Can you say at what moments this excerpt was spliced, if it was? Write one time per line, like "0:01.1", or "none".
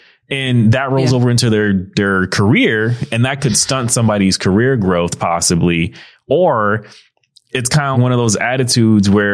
0:07.9